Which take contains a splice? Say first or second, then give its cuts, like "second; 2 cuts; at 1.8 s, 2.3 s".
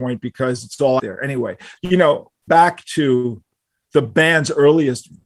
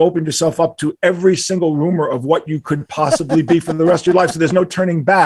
first; 3 cuts; at 1.0 s, 1.8 s, 2.5 s